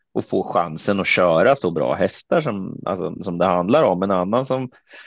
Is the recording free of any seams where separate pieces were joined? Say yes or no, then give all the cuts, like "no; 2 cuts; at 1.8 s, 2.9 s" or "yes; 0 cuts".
yes; 0 cuts